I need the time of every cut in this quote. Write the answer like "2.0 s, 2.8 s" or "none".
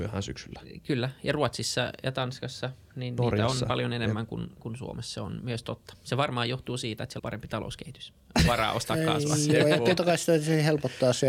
7.2 s, 10.0 s